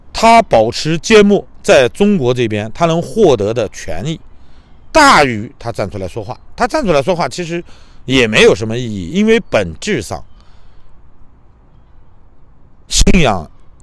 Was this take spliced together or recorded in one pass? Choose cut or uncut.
uncut